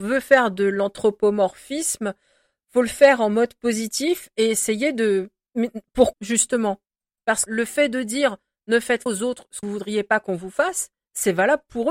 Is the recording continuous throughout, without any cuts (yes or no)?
no